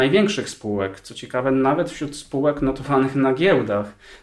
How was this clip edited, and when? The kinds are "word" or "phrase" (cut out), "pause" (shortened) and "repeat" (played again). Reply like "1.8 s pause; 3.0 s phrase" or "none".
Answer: none